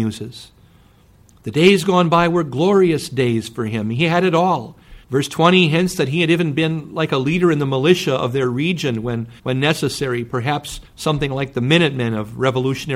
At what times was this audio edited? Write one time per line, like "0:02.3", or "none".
0:05.0
0:09.4
0:10.9